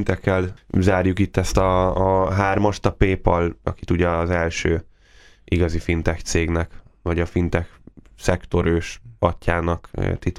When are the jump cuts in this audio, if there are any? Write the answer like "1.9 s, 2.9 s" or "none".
3.6 s